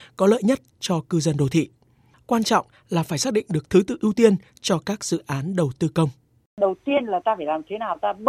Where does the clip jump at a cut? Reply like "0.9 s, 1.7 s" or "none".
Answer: none